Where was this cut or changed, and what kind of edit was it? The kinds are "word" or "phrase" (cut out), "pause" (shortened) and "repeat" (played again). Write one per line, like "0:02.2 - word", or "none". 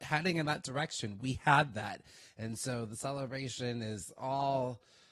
none